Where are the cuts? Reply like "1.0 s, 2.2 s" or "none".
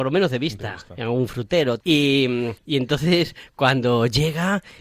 1.8 s, 2.6 s